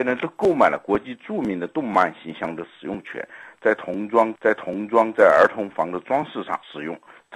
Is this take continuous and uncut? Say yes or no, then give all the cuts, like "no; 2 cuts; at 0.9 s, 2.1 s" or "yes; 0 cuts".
no; 1 cut; at 4.3 s